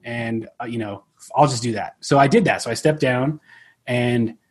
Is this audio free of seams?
yes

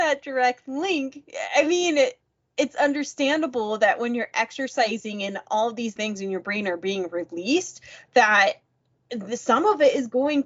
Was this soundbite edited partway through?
yes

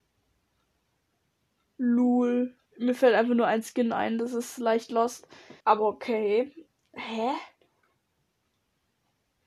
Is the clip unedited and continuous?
no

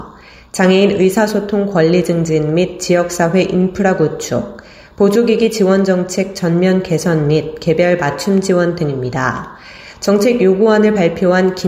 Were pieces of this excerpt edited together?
no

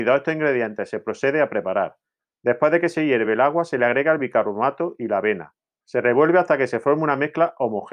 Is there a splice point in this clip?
no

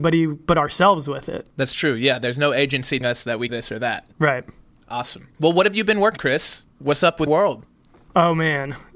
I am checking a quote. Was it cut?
yes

